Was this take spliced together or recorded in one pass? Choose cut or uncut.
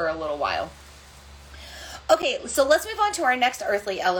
uncut